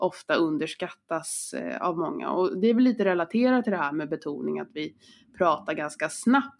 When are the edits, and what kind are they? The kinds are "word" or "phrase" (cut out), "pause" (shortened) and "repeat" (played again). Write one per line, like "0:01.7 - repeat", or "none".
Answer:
none